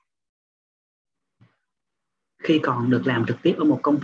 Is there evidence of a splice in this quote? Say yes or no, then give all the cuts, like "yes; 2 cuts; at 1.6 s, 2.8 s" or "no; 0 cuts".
no; 0 cuts